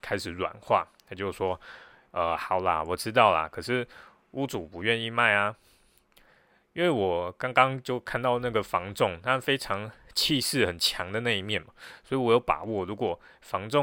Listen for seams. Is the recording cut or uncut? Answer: uncut